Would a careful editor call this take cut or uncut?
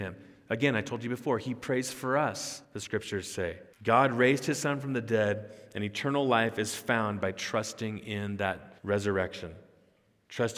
cut